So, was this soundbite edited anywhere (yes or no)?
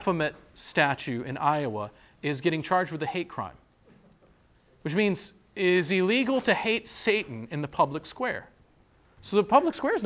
no